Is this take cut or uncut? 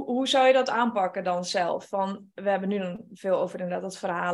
uncut